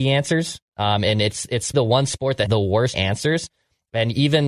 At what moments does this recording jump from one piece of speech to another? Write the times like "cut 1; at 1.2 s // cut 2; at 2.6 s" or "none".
cut 1; at 1.7 s // cut 2; at 2.5 s // cut 3; at 2.9 s